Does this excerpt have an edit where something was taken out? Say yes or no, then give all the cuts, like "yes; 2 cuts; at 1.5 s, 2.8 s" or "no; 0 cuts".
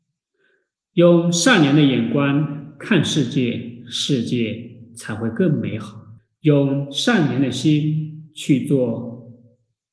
yes; 1 cut; at 6.2 s